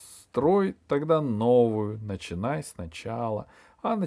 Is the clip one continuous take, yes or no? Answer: yes